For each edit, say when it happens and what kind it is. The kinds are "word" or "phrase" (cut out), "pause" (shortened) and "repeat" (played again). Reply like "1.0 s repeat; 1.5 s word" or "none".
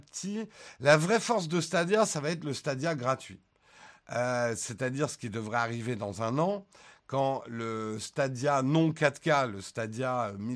none